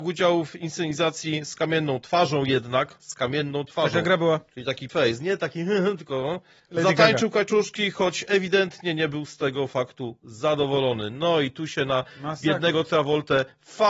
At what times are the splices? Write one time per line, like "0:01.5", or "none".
0:04.9
0:06.6